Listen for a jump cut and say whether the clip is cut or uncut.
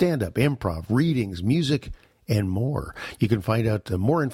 uncut